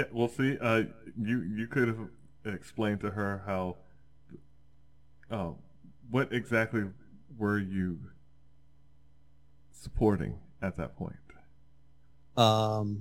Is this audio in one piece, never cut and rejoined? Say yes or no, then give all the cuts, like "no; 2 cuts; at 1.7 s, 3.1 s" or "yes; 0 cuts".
yes; 0 cuts